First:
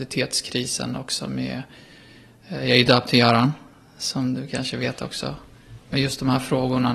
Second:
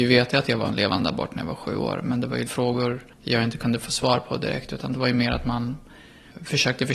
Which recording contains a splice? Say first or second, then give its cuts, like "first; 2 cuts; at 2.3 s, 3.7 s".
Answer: second; 2 cuts; at 2.5 s, 3.1 s